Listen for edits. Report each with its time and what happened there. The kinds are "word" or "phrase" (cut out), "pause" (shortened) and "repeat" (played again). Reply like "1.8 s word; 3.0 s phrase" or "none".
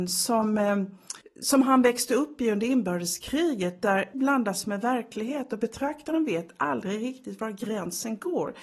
1.2 s pause; 4.1 s word